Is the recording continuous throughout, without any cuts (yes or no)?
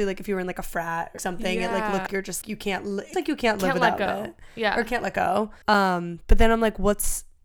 no